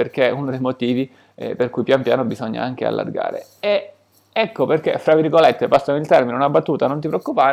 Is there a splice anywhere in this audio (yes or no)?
no